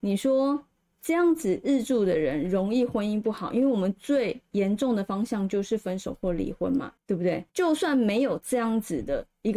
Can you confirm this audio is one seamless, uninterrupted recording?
no; 1 cut; at 7.5 s

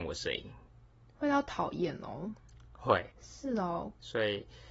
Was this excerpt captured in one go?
no; 1 cut; at 3.1 s

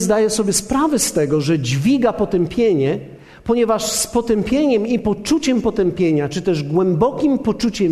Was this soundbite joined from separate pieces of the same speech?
no; 0 cuts

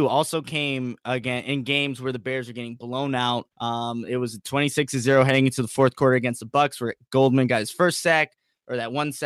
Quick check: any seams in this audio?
yes; 1 cut; at 3.5 s

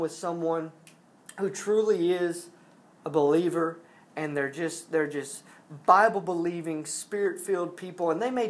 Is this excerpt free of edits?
yes; 0 cuts

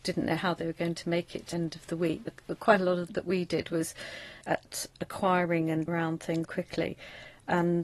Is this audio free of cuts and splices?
no; 6 cuts; at 1.5 s, 2.3 s, 3.1 s, 4.4 s, 5.9 s, 6.4 s

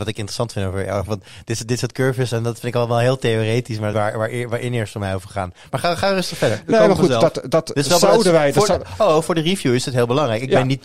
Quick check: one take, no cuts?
no; 1 cut; at 3.9 s

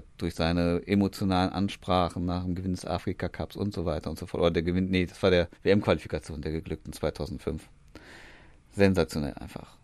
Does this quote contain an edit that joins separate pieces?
yes; 1 cut; at 5.5 s

